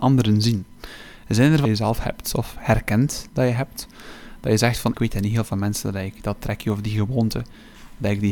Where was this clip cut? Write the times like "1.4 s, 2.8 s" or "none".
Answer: 1.6 s, 4.9 s